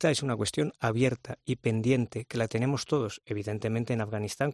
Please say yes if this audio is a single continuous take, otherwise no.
yes